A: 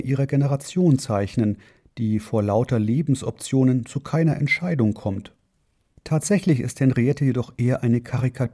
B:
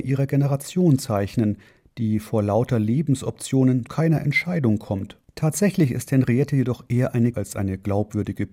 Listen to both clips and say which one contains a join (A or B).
B